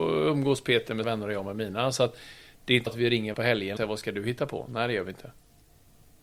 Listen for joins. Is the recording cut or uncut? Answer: cut